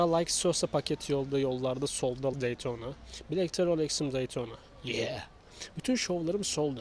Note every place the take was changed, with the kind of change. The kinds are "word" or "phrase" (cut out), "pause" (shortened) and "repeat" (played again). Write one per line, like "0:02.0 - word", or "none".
0:02.3 - word